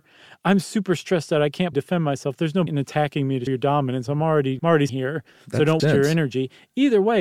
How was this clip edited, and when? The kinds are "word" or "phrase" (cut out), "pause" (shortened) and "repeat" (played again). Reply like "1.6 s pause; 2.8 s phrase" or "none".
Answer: 1.7 s word; 2.7 s word; 3.5 s word; 4.6 s word; 4.9 s word; 5.8 s word